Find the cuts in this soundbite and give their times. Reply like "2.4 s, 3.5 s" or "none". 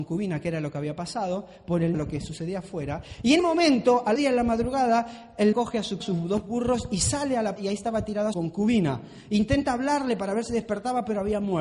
1.9 s, 3.4 s, 4.2 s, 5.5 s, 6.0 s, 7.6 s, 8.3 s